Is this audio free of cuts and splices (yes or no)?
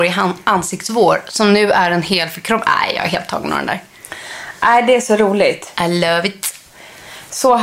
yes